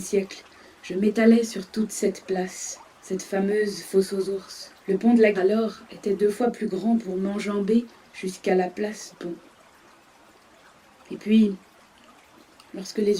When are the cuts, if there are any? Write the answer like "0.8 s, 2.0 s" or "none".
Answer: 2.9 s, 4.8 s, 5.3 s, 9.1 s